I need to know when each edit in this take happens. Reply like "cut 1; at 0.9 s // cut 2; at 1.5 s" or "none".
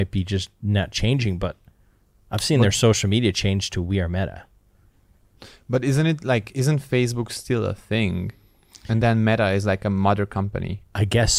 none